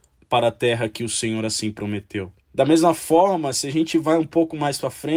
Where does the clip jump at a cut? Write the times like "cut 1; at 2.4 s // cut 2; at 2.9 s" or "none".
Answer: cut 1; at 2.4 s